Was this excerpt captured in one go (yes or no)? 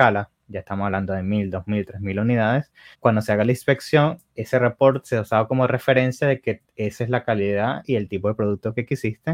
no